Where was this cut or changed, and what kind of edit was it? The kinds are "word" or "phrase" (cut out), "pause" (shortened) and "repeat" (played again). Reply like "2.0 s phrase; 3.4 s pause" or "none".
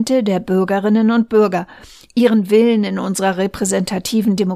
none